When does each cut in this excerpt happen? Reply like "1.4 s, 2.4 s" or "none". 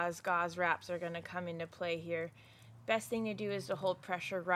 none